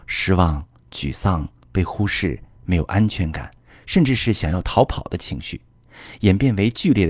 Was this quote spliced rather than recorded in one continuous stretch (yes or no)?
no